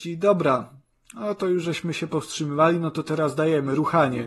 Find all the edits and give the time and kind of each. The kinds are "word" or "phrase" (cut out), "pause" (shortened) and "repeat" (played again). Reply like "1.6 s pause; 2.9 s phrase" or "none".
none